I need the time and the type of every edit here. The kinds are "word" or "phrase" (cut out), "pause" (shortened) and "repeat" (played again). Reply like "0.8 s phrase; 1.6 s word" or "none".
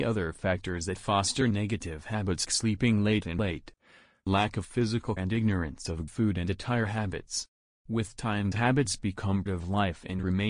2.4 s word; 3.4 s word; 5.2 s word; 6.1 s word; 8.5 s word; 9.5 s word